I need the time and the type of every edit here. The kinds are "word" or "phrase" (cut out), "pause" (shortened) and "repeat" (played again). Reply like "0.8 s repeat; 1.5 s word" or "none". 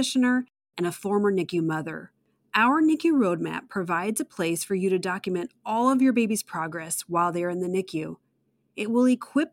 none